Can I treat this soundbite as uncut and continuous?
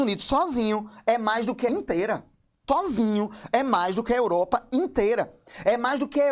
no; 2 cuts; at 1.7 s, 2.7 s

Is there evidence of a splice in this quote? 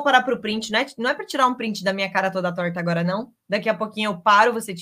no; 0 cuts

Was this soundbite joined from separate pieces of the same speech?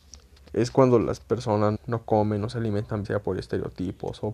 yes; 2 cuts; at 1.7 s, 3.0 s

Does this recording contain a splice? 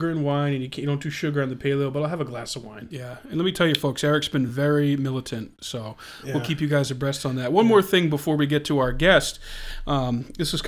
no; 0 cuts

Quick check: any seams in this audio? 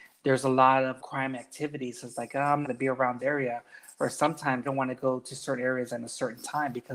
yes; 4 cuts; at 1.0 s, 2.6 s, 3.2 s, 4.6 s

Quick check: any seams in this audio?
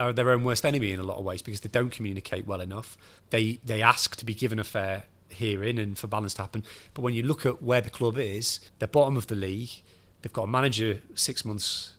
yes; 3 cuts; at 3.2 s, 4.2 s, 8.7 s

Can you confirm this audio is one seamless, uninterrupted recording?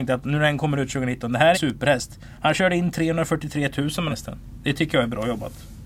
no; 2 cuts; at 1.5 s, 4.1 s

